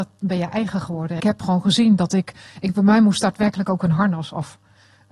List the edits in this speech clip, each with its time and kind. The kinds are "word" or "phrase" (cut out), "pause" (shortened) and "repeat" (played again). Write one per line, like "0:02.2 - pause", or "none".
0:01.2 - word